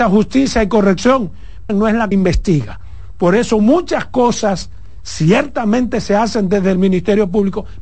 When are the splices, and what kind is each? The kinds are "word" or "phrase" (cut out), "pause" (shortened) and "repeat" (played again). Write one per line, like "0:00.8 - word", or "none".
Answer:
0:01.7 - phrase
0:02.1 - word

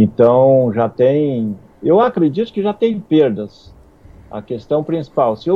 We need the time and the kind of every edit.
none

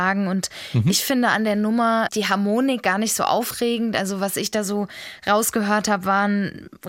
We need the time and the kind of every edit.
0:02.1 - word

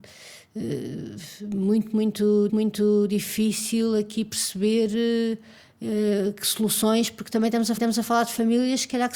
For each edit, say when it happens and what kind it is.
0:02.5 - repeat
0:07.8 - repeat

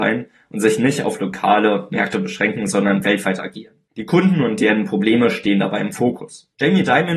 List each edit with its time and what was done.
none

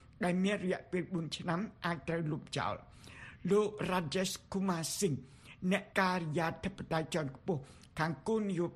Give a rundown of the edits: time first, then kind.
0:05.9 - pause

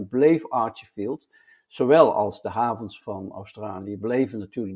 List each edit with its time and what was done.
none

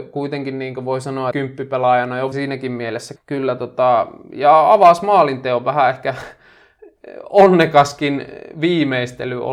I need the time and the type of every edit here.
0:01.3 - phrase
0:02.3 - phrase
0:03.2 - word

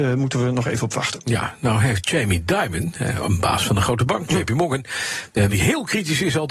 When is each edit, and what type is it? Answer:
0:05.5 - word

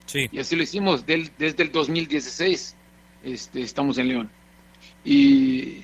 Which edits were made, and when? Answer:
none

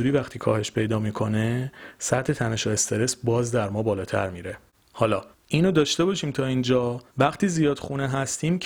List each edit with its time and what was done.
0:05.3 - pause
0:07.1 - pause

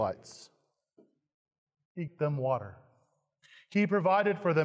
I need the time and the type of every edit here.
0:02.1 - word

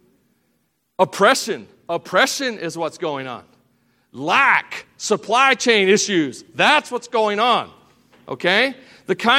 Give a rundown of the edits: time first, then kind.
none

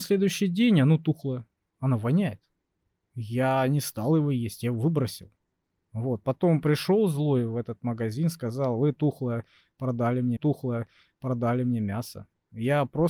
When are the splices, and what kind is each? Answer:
0:10.4 - repeat

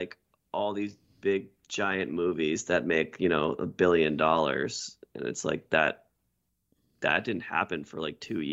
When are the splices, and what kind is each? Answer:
none

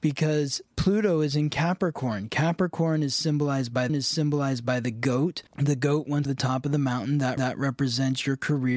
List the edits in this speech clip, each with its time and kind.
0:03.9 - repeat
0:05.5 - pause
0:06.3 - phrase
0:07.4 - repeat

